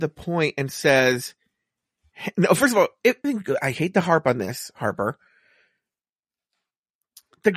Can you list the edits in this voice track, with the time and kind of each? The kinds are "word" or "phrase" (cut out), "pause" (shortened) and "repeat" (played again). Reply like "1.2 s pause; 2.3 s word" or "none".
3.2 s phrase

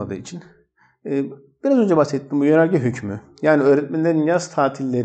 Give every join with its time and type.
none

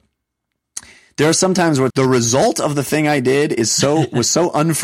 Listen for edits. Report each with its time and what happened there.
1.9 s word

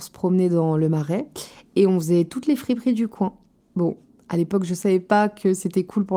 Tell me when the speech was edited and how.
none

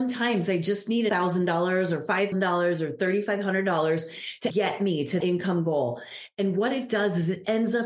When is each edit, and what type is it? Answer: 1.1 s phrase; 2.3 s word; 4.5 s word; 5.2 s word

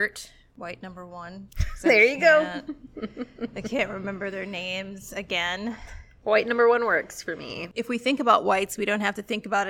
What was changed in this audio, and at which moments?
none

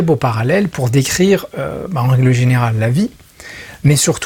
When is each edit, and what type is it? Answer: none

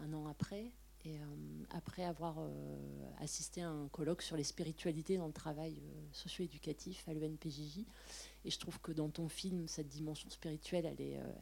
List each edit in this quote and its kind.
none

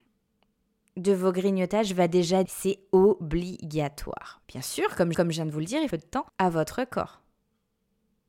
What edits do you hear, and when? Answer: 2.4 s word; 4.4 s pause; 5.1 s repeat; 5.9 s phrase; 6.3 s pause

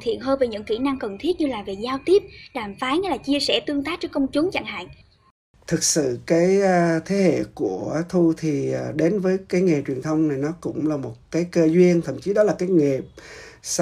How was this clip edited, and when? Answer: none

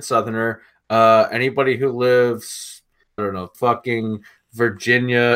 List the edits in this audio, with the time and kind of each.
3.2 s word; 3.5 s phrase

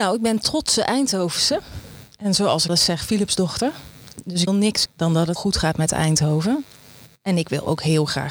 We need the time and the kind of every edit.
2.7 s word; 4.5 s word; 4.9 s word; 5.4 s word

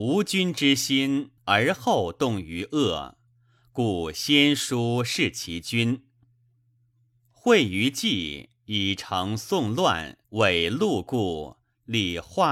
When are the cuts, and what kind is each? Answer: 1.4 s pause; 10.2 s pause

